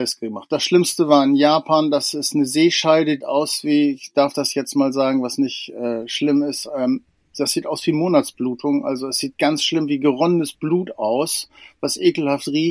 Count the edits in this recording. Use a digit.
1